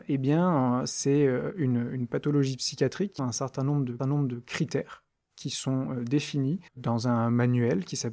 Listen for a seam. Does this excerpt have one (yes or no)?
yes